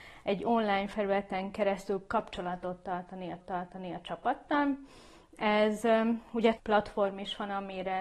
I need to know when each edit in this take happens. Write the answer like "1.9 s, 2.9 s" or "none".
3.4 s, 6.6 s